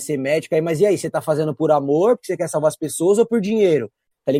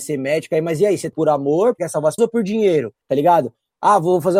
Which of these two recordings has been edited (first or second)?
second